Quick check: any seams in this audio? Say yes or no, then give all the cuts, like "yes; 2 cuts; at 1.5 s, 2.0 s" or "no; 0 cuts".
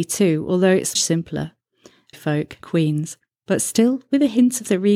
yes; 3 cuts; at 1.0 s, 2.1 s, 2.6 s